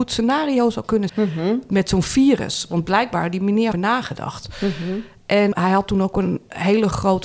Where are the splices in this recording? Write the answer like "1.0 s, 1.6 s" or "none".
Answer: 1.1 s, 3.7 s, 5.5 s